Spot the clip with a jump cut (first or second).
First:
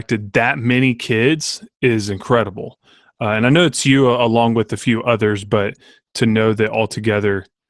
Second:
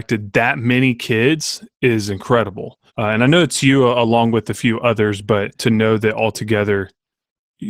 second